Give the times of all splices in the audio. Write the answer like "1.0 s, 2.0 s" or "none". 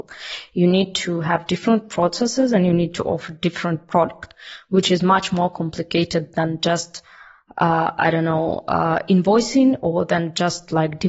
none